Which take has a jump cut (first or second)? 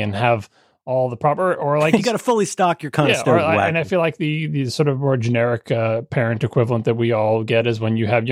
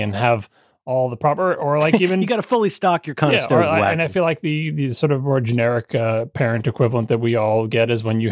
first